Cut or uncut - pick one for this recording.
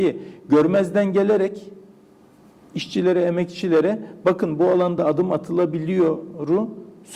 uncut